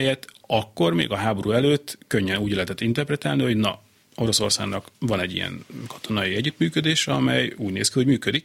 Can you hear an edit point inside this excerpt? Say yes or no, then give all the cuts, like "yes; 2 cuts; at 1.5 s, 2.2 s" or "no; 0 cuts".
yes; 1 cut; at 4.9 s